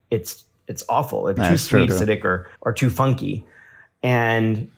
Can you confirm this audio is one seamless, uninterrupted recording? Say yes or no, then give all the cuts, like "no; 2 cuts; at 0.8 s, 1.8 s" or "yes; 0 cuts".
no; 3 cuts; at 1.4 s, 1.9 s, 2.6 s